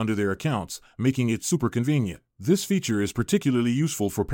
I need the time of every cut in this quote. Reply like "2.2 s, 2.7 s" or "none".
2.3 s